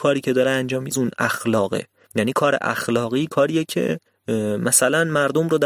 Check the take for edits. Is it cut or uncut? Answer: cut